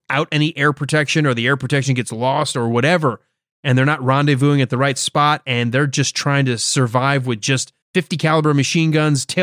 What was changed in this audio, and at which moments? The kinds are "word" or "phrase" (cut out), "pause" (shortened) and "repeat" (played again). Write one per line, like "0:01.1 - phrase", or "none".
0:07.8 - pause